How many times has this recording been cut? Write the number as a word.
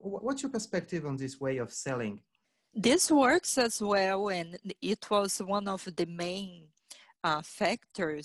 one